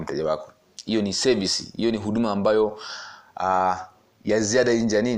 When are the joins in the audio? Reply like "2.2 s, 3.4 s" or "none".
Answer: none